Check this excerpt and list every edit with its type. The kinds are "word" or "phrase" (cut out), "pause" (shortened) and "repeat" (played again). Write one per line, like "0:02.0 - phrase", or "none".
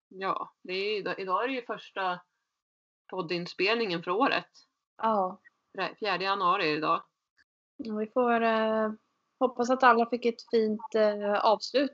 none